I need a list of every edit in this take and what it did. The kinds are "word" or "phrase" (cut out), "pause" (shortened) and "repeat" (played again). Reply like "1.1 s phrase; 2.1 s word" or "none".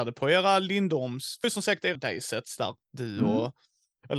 1.4 s phrase; 1.9 s word; 2.8 s pause

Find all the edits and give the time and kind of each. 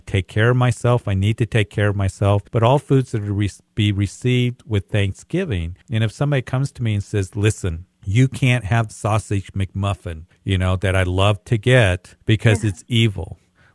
2.5 s pause; 5.8 s pause; 7.9 s pause; 8.9 s word; 10.3 s pause; 12.2 s pause

